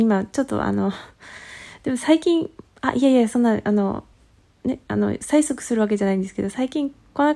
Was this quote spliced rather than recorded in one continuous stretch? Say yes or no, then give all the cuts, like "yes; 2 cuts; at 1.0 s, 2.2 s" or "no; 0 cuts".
no; 0 cuts